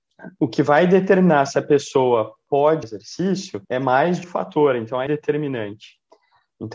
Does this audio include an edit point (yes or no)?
yes